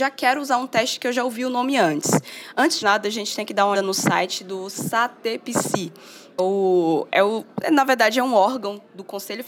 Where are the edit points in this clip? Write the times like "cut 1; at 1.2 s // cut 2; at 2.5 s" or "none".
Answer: cut 1; at 2.8 s // cut 2; at 3.7 s // cut 3; at 6.4 s

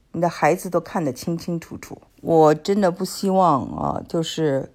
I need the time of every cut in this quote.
cut 1; at 2.1 s

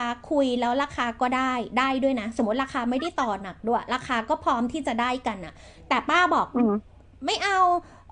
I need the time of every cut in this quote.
none

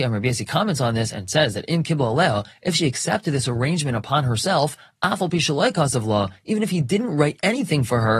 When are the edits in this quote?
none

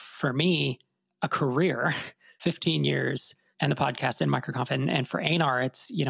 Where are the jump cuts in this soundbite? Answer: none

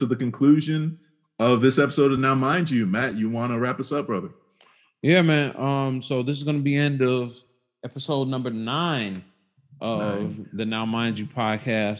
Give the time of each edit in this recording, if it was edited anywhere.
none

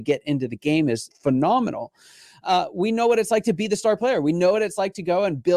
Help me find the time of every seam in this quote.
cut 1; at 1.1 s

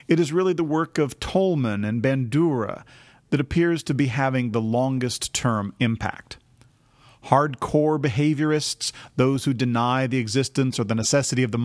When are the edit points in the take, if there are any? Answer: none

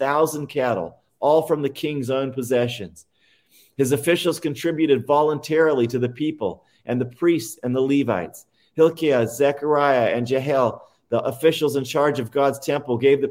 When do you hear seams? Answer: none

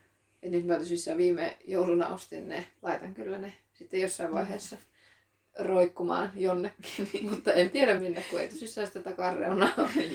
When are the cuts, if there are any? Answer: cut 1; at 8.0 s

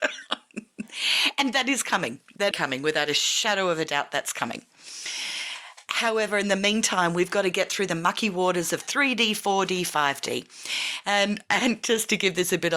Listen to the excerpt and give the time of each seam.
cut 1; at 2.5 s

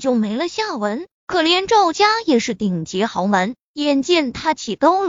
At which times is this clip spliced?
cut 1; at 1.1 s

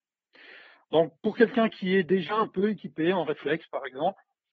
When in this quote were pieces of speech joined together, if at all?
none

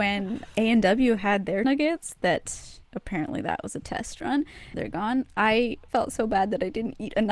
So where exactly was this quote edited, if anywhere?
cut 1; at 1.6 s // cut 2; at 2.8 s // cut 3; at 4.7 s // cut 4; at 5.9 s

